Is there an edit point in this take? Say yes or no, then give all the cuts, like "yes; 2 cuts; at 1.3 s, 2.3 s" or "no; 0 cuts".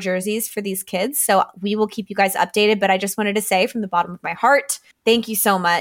yes; 1 cut; at 4.9 s